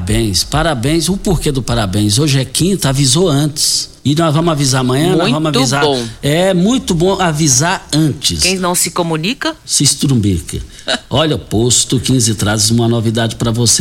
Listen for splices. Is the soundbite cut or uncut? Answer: cut